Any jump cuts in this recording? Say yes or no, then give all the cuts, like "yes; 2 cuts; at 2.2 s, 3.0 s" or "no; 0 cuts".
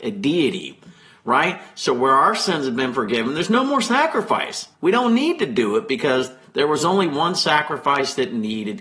yes; 1 cut; at 4.7 s